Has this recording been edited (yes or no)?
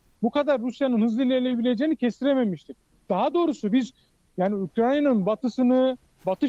no